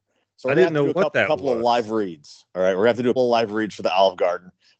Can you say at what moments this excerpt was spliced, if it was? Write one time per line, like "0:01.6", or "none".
0:03.2